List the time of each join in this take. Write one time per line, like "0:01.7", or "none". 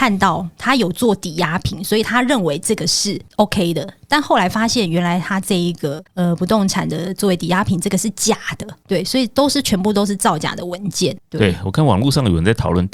0:03.3
0:06.1